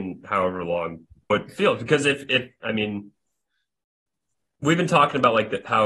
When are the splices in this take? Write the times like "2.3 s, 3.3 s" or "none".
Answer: 1.3 s